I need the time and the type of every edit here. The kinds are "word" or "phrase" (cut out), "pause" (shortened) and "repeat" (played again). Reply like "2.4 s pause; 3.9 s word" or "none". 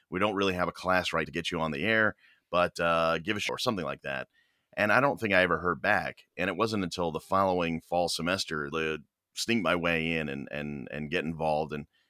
1.2 s word; 3.5 s phrase; 8.7 s phrase